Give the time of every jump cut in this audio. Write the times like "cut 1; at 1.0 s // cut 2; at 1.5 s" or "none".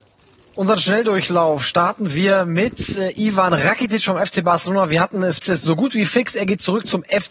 cut 1; at 5.4 s